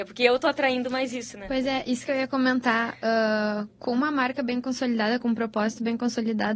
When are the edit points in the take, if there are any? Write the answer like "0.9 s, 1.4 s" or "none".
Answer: none